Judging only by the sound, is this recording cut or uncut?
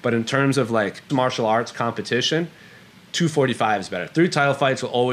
cut